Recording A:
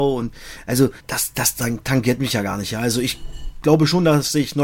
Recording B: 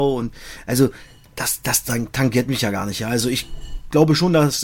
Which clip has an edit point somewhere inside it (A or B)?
A